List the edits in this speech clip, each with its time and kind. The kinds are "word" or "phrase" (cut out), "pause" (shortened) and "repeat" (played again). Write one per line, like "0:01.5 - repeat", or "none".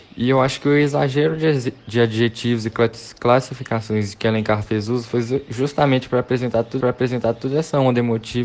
0:06.8 - repeat